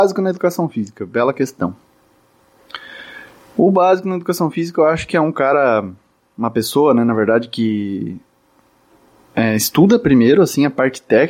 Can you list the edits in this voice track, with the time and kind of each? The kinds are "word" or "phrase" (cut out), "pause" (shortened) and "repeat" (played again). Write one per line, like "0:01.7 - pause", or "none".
0:03.4 - pause